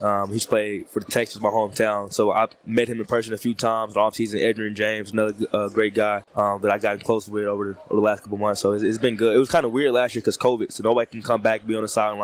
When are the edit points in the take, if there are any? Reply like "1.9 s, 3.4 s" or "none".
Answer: 6.3 s

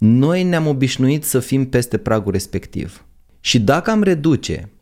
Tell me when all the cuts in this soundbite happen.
none

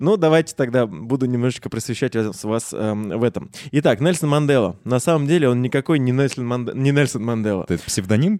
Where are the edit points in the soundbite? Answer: none

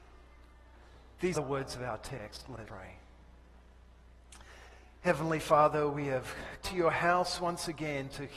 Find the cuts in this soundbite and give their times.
1.3 s, 2.6 s, 6.6 s

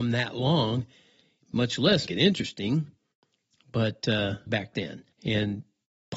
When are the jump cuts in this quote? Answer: 2.1 s, 4.5 s, 5.1 s

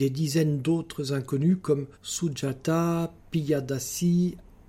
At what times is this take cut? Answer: 1.9 s

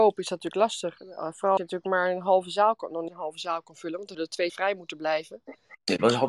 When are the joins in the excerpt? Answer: 1.6 s, 3.1 s, 4.1 s, 4.5 s

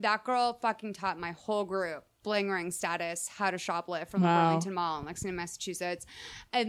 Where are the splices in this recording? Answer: none

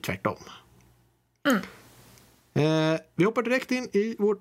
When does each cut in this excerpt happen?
none

